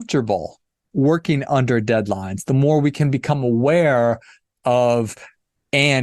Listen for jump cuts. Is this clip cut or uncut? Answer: uncut